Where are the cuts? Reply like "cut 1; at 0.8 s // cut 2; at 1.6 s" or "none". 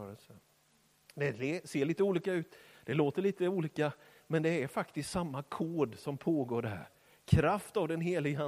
none